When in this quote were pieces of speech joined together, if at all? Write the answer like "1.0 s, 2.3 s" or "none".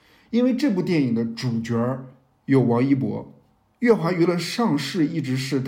none